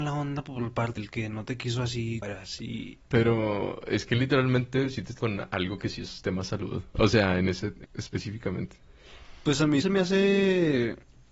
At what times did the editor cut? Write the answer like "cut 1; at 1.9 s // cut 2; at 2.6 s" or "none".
cut 1; at 1.0 s // cut 2; at 2.2 s // cut 3; at 3.1 s // cut 4; at 5.2 s // cut 5; at 7.8 s // cut 6; at 9.8 s